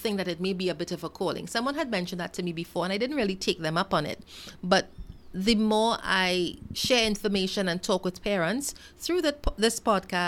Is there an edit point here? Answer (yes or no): no